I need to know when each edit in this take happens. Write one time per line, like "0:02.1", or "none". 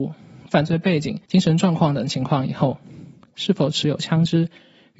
0:01.2